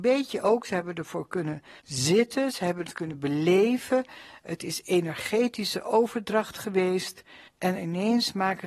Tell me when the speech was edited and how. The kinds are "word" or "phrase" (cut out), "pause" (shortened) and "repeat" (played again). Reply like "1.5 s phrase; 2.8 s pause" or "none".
1.8 s pause; 7.5 s pause